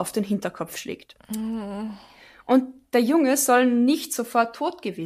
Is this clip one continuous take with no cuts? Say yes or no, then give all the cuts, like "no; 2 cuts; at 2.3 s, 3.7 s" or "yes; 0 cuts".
yes; 0 cuts